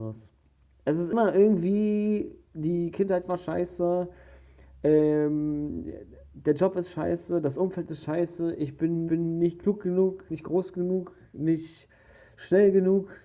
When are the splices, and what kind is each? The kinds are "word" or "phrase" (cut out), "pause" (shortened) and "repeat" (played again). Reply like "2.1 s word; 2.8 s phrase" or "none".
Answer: 6.2 s pause; 9.1 s repeat; 10.3 s phrase